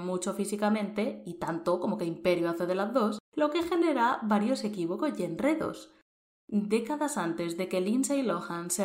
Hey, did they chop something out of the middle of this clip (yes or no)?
no